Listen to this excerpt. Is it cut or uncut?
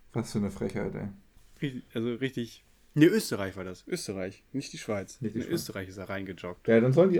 uncut